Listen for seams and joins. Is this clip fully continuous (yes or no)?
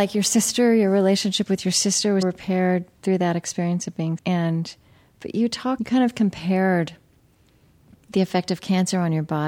no